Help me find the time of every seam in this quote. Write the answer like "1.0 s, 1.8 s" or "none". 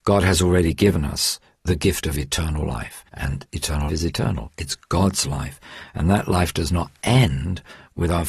1.5 s, 3.1 s, 3.9 s